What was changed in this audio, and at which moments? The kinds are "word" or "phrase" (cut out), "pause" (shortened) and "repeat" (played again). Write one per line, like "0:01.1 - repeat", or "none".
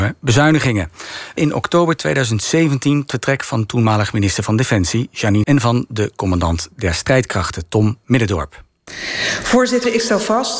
0:01.4 - word
0:03.1 - word
0:05.4 - word